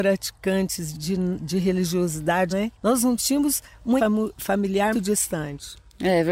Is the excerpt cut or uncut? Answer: cut